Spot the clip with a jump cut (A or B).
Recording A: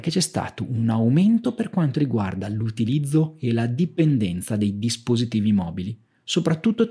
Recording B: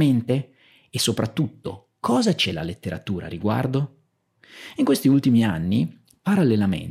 B